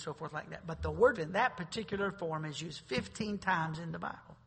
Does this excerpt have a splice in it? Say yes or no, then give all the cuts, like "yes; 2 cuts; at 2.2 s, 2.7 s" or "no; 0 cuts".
yes; 1 cut; at 1.1 s